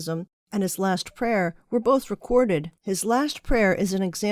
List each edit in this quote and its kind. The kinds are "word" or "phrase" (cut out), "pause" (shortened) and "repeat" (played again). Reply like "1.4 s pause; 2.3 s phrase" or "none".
2.8 s pause